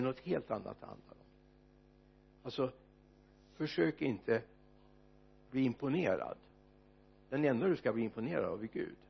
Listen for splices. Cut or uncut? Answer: uncut